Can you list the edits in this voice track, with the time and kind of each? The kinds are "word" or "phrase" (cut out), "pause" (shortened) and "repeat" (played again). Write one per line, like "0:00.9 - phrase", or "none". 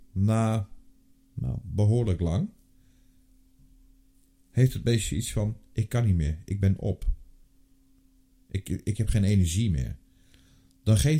none